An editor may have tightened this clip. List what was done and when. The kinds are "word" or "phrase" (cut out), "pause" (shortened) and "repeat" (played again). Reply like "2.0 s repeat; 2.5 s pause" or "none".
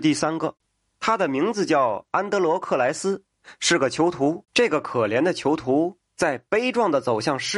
4.5 s pause